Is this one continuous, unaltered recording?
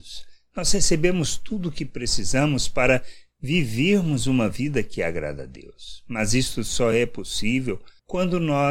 yes; 0 cuts

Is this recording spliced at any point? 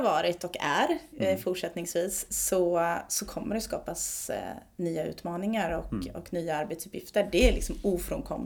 no; 0 cuts

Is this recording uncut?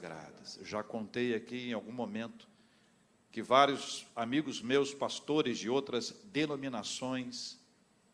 yes; 0 cuts

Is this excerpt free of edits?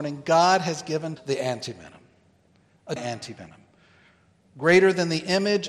no; 2 cuts; at 1.2 s, 3.0 s

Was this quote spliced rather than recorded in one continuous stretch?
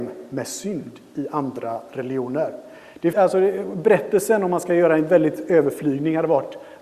yes; 1 cut; at 3.1 s

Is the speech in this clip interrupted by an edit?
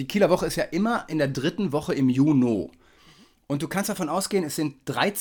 no; 0 cuts

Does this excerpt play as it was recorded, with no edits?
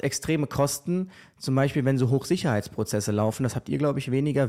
yes; 0 cuts

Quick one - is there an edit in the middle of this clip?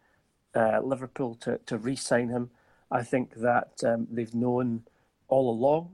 no; 0 cuts

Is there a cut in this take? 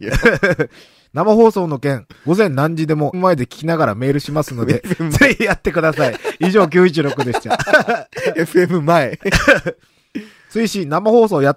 yes; 1 cut; at 3.1 s

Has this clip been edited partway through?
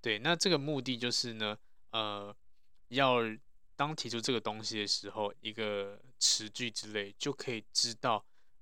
yes; 1 cut; at 5.3 s

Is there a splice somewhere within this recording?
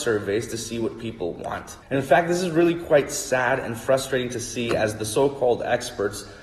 yes; 1 cut; at 1.8 s

